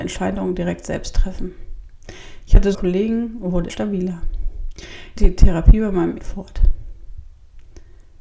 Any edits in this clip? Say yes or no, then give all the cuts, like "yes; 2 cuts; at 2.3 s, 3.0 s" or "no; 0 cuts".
yes; 4 cuts; at 2.7 s, 3.7 s, 5.2 s, 6.2 s